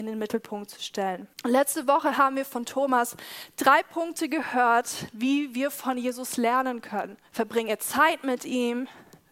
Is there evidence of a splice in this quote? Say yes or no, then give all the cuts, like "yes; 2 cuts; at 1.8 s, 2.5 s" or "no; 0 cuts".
yes; 2 cuts; at 1.3 s, 7.3 s